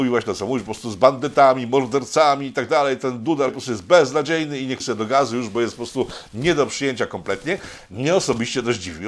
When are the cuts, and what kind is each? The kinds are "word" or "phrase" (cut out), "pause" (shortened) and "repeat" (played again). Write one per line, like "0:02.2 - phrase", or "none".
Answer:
0:03.5 - word
0:04.8 - word